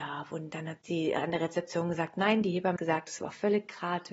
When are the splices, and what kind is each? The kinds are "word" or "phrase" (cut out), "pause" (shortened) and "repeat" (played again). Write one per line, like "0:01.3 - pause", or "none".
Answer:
0:02.8 - word